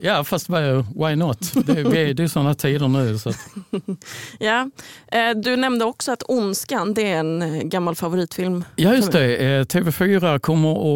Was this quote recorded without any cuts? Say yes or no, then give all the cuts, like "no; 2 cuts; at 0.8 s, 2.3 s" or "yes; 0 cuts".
yes; 0 cuts